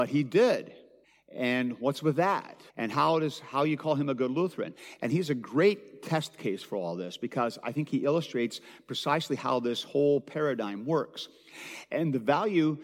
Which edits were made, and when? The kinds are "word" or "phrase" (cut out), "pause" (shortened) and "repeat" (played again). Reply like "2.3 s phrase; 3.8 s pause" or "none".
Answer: 1.0 s pause; 2.7 s pause